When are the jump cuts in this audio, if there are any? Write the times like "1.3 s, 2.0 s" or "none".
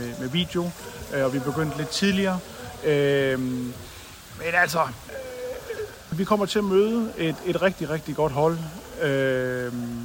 none